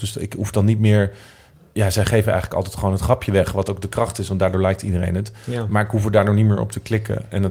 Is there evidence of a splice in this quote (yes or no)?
no